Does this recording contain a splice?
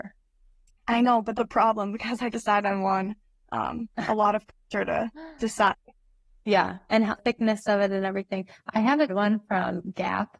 yes; 4 cuts; at 1.4 s, 2.3 s, 7.2 s, 9.1 s

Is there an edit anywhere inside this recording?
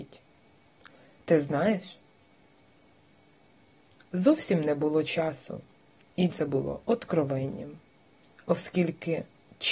yes; 1 cut; at 6.3 s

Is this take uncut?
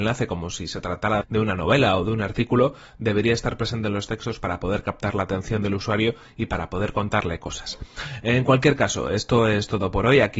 no; 1 cut; at 1.2 s

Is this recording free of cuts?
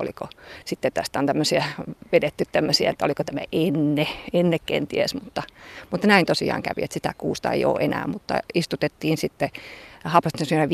yes; 0 cuts

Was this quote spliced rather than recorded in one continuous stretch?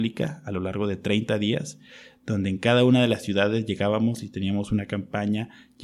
no; 0 cuts

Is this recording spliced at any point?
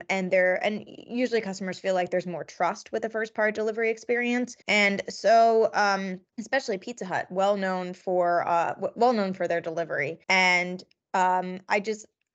yes; 3 cuts; at 4.6 s, 6.3 s, 10.2 s

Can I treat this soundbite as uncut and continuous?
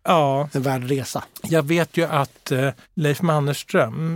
no; 1 cut; at 2.8 s

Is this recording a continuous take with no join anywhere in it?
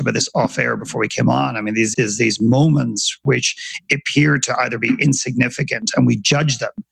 no; 1 cut; at 1.9 s

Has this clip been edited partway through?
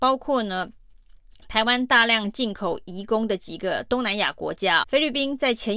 yes; 1 cut; at 4.8 s

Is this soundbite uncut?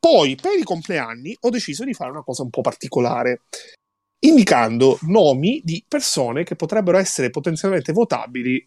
yes; 0 cuts

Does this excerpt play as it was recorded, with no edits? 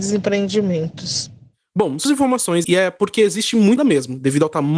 no; 3 cuts; at 2.0 s, 2.6 s, 3.8 s

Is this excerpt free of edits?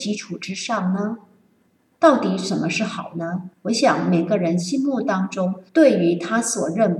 no; 2 cuts; at 3.5 s, 5.7 s

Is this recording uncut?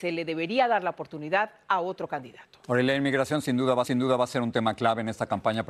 no; 2 cuts; at 2.6 s, 3.8 s

